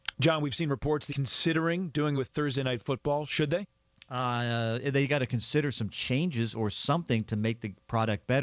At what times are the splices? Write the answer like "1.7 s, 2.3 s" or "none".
1.1 s, 2.2 s